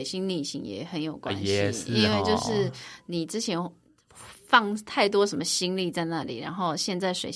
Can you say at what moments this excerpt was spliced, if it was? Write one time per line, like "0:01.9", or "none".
none